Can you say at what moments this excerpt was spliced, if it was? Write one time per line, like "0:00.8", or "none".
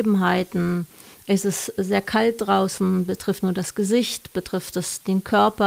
0:03.4